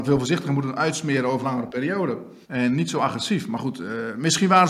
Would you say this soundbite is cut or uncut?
cut